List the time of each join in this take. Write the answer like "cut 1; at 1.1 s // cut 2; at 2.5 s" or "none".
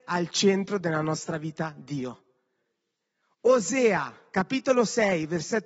none